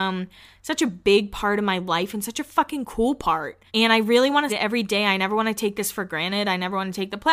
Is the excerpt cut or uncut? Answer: cut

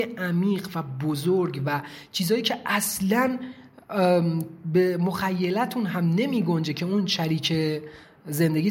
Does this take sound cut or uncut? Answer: uncut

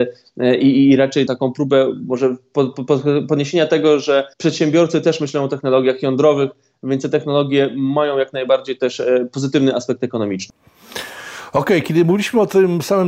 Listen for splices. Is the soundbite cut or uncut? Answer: cut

